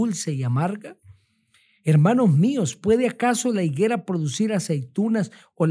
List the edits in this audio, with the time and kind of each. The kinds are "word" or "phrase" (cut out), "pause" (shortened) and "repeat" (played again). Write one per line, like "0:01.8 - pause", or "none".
none